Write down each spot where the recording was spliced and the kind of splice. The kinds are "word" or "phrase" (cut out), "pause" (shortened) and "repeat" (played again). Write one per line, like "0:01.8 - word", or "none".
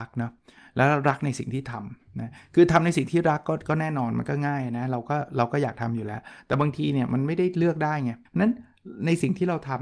0:08.3 - pause